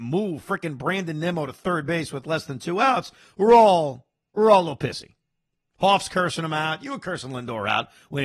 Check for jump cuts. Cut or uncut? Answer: uncut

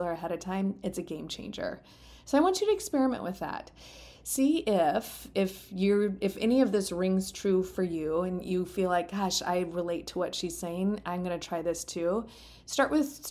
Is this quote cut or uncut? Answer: uncut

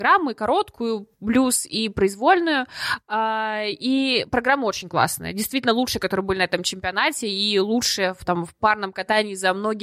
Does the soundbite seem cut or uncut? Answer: cut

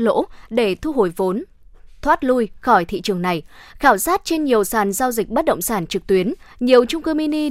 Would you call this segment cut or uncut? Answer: uncut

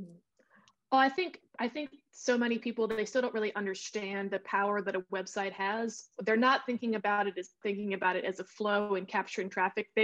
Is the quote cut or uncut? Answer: cut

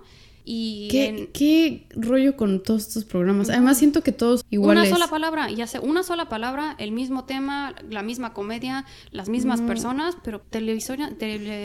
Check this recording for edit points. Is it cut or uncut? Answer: cut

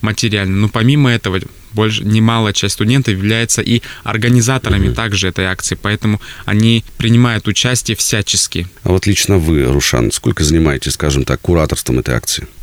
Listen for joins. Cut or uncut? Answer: uncut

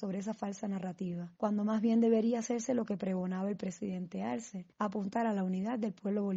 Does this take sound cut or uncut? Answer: cut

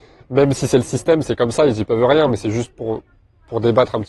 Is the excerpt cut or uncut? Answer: uncut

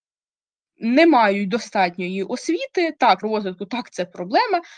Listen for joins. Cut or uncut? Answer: cut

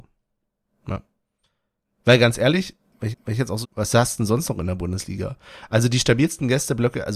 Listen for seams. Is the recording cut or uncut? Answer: cut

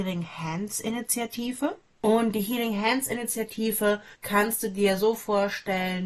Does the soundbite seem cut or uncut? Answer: cut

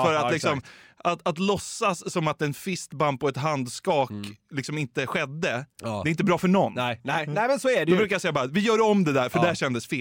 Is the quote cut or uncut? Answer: uncut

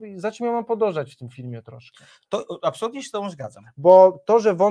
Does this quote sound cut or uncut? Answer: uncut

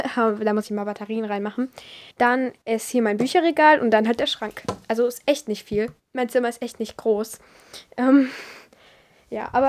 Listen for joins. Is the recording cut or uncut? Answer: cut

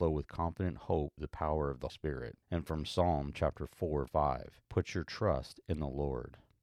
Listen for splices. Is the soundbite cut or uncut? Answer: cut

